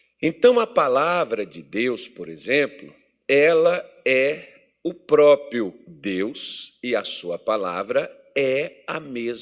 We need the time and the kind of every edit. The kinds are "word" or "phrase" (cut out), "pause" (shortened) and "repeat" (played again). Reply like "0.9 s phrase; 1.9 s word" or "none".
none